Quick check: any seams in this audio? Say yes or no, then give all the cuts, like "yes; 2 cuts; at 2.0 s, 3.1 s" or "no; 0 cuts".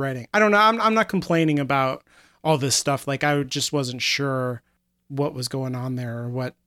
no; 0 cuts